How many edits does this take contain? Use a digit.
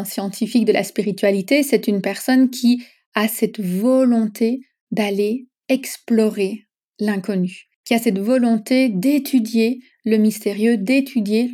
1